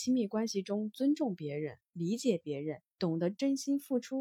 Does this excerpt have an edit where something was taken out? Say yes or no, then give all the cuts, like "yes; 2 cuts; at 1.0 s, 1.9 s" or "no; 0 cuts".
yes; 1 cut; at 2.9 s